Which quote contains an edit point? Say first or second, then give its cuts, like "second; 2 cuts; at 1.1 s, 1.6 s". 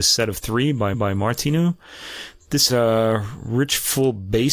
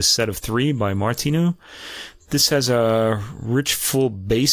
first; 2 cuts; at 0.9 s, 2.7 s